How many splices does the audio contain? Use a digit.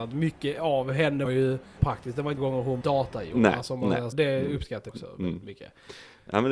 6